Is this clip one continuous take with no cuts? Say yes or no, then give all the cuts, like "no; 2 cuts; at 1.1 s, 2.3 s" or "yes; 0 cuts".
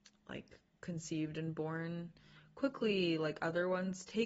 yes; 0 cuts